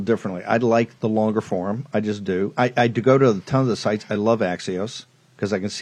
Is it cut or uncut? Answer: uncut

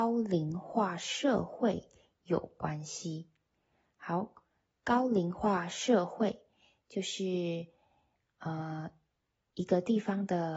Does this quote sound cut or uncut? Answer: uncut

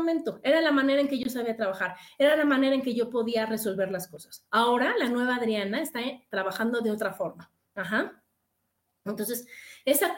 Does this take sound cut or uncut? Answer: uncut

